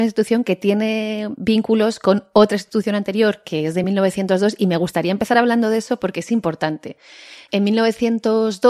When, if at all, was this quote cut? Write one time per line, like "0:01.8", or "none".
none